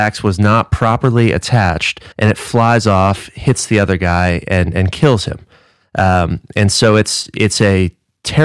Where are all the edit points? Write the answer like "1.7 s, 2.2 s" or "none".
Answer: 2.1 s